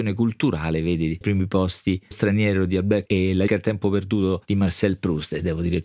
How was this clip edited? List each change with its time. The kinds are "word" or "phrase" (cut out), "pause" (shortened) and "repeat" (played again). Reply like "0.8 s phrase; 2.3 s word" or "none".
1.2 s word; 2.1 s word; 3.1 s word; 3.5 s word